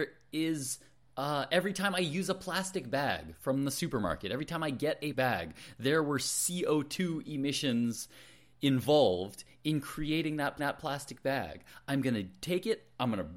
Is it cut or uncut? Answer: cut